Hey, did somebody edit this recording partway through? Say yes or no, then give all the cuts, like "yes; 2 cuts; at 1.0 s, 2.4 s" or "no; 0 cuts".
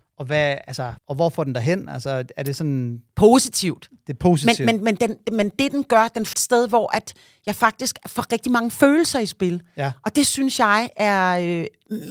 yes; 2 cuts; at 1.0 s, 6.3 s